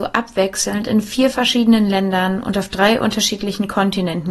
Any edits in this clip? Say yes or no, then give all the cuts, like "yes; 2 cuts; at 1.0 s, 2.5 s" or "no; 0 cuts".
no; 0 cuts